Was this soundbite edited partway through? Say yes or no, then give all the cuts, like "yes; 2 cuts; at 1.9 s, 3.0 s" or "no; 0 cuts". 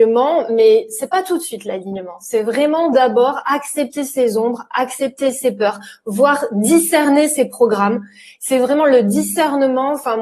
no; 0 cuts